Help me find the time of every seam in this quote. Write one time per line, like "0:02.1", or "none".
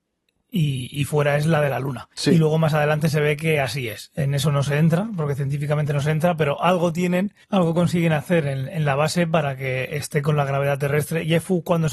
0:02.1
0:07.4